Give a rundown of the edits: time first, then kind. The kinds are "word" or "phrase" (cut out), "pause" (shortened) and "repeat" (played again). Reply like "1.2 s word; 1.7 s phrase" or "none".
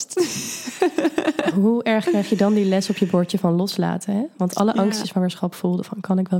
5.0 s phrase

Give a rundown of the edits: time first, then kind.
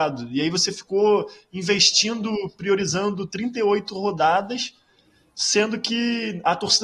none

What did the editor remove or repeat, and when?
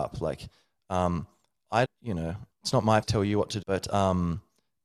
1.8 s word; 2.5 s word; 3.0 s word; 3.6 s word

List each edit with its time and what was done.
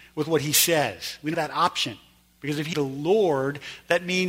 1.3 s word; 2.7 s word

